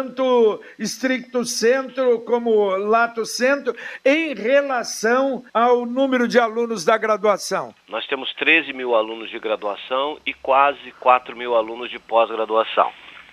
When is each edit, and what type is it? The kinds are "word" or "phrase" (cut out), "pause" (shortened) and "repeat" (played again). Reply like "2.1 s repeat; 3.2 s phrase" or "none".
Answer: 5.5 s pause; 7.8 s pause